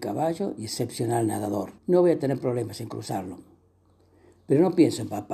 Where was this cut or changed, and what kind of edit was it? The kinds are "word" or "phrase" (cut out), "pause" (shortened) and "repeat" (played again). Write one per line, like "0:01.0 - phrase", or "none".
0:01.8 - pause